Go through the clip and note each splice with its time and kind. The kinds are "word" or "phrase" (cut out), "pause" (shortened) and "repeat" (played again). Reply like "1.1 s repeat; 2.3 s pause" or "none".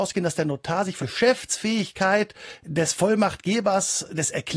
1.0 s word